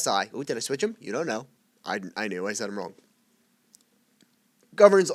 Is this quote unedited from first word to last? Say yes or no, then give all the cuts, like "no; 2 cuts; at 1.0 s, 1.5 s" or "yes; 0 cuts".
yes; 0 cuts